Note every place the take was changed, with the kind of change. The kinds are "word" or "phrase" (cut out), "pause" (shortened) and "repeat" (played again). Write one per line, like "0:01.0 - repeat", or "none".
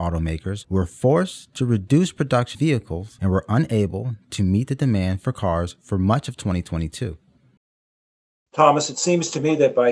0:02.5 - word